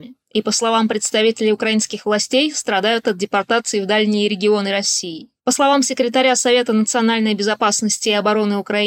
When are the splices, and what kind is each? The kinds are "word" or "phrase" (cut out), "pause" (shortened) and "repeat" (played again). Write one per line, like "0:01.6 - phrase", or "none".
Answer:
none